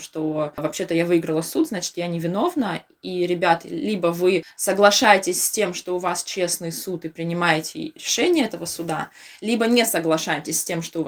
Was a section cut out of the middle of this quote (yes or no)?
no